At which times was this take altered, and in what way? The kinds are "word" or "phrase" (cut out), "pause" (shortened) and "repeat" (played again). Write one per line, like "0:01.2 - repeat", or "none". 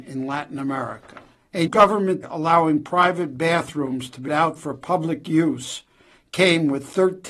0:01.7 - word
0:02.2 - word
0:04.3 - word

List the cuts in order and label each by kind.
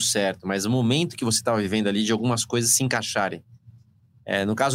none

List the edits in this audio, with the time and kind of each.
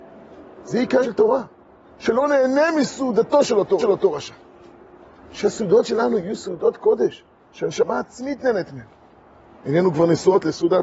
0:01.0 - word
0:03.8 - repeat

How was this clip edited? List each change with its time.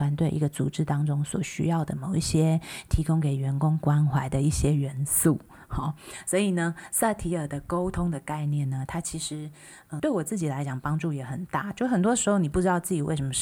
0:10.0 - word

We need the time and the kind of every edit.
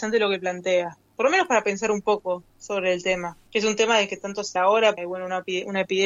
0:02.5 - pause
0:03.5 - pause
0:04.6 - word
0:05.0 - word

